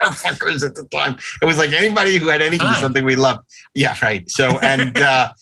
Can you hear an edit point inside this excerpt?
yes; 1 cut; at 2.6 s

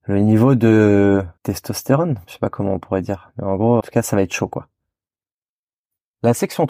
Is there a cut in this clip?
yes; 2 cuts; at 1.4 s, 3.8 s

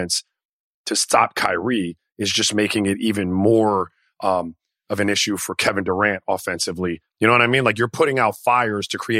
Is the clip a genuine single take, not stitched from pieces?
yes; 0 cuts

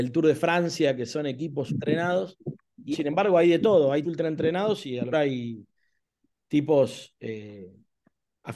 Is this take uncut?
no; 4 cuts; at 1.7 s, 2.9 s, 4.0 s, 5.1 s

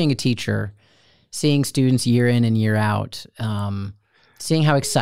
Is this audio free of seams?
yes; 0 cuts

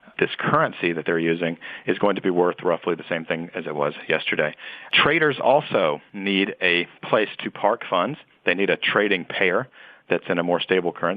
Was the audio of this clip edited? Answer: no; 0 cuts

